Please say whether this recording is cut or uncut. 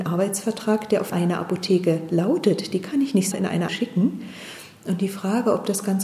cut